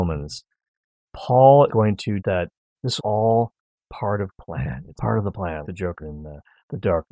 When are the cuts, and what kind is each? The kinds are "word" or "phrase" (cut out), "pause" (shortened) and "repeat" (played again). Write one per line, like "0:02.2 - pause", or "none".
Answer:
0:01.7 - word
0:02.2 - word
0:03.0 - word
0:04.3 - word
0:05.0 - word
0:05.6 - word
0:06.0 - word